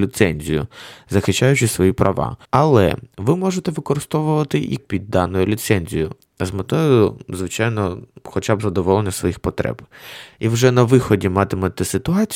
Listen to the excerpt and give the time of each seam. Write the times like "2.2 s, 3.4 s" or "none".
2.4 s, 4.8 s